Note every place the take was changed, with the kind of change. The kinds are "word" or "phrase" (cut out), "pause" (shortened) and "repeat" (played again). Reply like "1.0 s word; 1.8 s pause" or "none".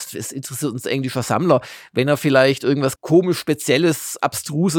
3.0 s word